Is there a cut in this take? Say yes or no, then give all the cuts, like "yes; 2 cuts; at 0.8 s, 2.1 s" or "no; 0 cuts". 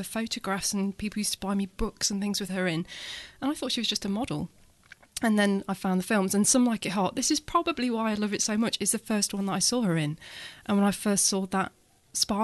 no; 0 cuts